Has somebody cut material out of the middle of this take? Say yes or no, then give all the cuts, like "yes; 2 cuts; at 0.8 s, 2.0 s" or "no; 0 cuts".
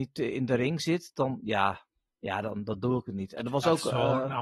no; 0 cuts